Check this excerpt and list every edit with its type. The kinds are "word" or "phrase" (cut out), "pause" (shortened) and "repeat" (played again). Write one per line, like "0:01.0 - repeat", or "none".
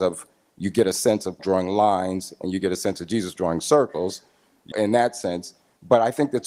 0:01.4 - word
0:04.7 - word